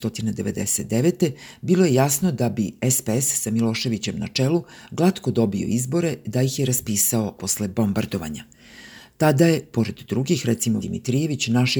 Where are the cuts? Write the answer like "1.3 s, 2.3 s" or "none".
7.4 s, 10.8 s